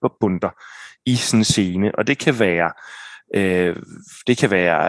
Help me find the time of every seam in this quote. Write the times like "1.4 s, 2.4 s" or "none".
none